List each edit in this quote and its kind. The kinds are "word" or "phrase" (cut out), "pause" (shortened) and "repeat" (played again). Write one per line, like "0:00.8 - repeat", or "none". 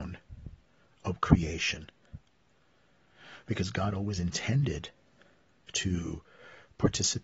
none